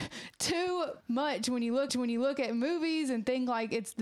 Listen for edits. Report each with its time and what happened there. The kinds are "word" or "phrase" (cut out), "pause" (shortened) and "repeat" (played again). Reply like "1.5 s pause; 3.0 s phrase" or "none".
1.0 s pause; 1.9 s repeat